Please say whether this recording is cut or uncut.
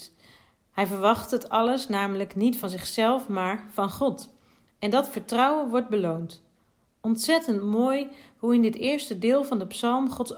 uncut